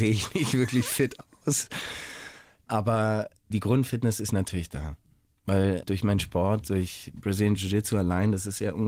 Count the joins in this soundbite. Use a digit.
0